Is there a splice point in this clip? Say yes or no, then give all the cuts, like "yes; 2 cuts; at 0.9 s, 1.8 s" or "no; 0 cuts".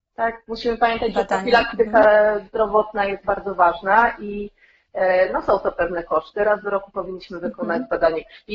no; 0 cuts